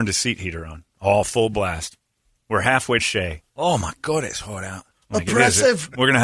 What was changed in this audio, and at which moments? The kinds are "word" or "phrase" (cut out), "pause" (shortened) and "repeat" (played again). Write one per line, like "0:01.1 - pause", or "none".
0:03.0 - word

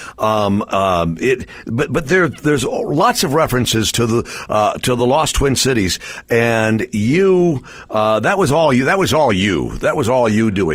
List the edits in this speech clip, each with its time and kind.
none

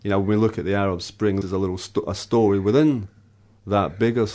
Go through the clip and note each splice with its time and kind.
0:01.4 - word

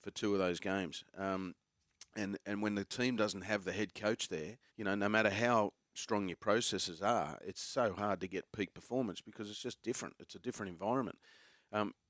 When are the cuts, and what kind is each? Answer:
0:04.7 - pause

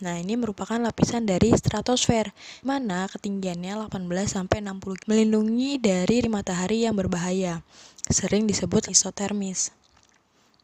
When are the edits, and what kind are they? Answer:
0:02.6 - word
0:05.0 - word
0:06.2 - word
0:08.9 - word

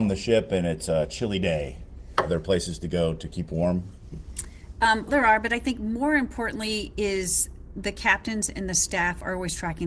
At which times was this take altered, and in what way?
0:05.1 - word

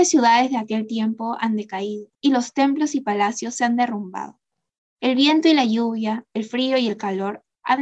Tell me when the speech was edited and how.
0:02.1 - pause

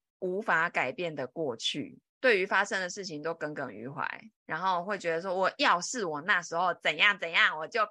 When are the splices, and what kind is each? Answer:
0:02.1 - pause
0:04.3 - pause

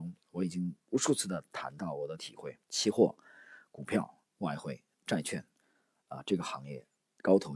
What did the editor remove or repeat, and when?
0:02.6 - pause

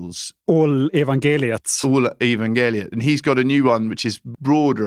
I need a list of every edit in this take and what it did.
none

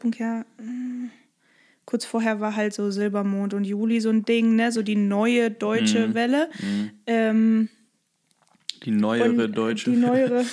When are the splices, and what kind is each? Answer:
none

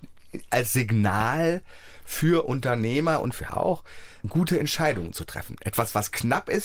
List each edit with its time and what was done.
0:03.5 - word

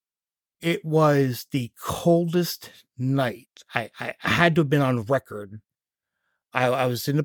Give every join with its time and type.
none

